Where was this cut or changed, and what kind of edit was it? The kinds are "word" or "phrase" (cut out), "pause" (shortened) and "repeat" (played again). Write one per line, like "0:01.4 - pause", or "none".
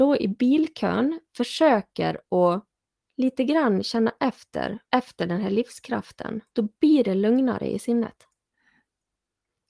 0:01.2 - pause
0:03.0 - pause
0:04.8 - pause
0:06.5 - pause